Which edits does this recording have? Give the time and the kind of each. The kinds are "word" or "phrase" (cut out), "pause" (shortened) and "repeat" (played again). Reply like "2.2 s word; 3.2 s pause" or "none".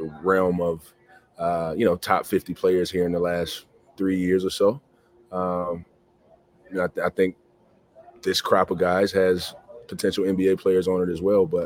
none